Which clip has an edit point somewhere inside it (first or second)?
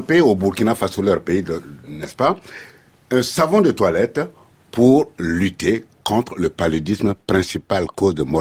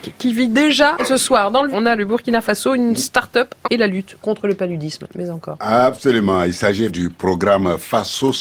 second